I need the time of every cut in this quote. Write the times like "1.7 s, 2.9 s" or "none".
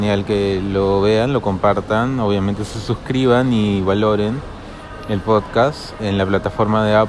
6.0 s